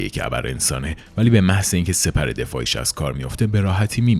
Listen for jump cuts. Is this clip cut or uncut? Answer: uncut